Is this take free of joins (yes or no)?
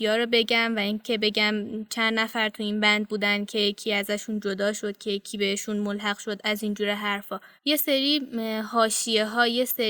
no